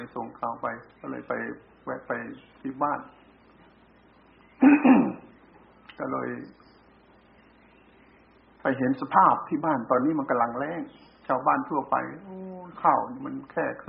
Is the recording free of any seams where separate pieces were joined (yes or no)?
no